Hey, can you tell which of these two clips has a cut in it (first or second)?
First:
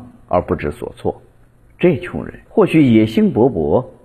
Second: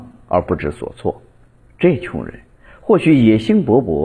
first